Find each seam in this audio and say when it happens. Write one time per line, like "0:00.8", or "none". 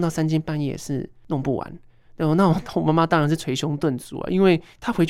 none